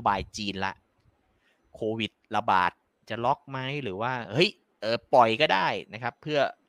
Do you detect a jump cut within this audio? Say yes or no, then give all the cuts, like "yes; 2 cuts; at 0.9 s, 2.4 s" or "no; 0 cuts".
no; 0 cuts